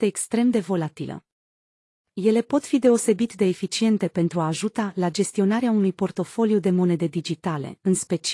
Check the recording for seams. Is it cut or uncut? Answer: uncut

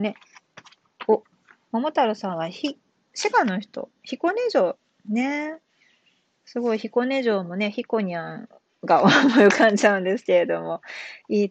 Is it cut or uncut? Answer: uncut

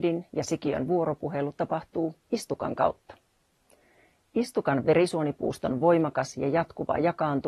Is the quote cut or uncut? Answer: uncut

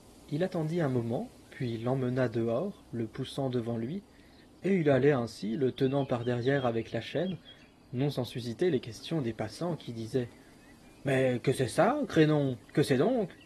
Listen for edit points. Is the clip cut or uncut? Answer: uncut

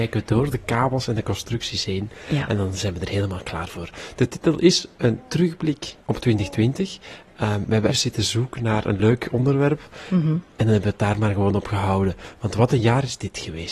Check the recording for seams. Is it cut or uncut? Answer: cut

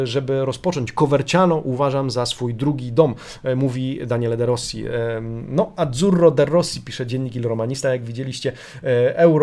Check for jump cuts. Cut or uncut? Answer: uncut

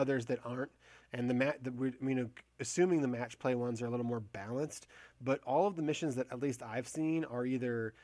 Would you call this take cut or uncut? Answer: uncut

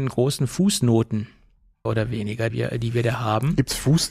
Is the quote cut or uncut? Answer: cut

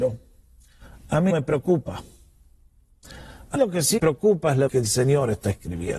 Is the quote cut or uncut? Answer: cut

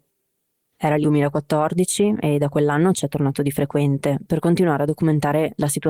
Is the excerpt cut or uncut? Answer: cut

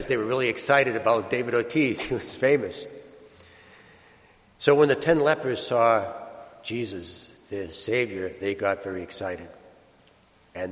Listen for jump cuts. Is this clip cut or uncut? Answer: uncut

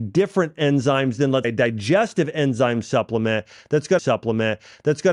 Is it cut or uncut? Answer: cut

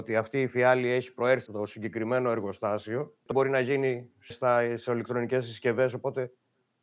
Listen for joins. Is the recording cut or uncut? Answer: cut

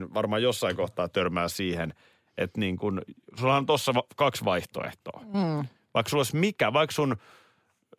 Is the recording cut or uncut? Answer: uncut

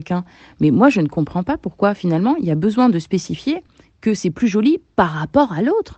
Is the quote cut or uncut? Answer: uncut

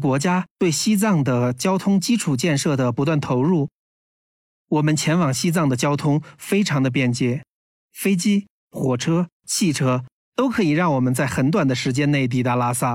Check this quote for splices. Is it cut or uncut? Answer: uncut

